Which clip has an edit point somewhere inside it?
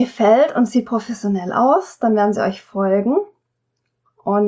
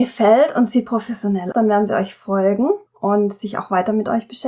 second; 2 cuts; at 1.5 s, 2.9 s

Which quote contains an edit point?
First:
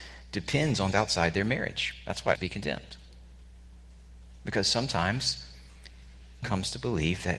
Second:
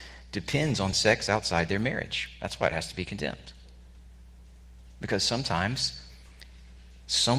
first; 3 cuts; at 0.9 s, 2.4 s, 6.4 s

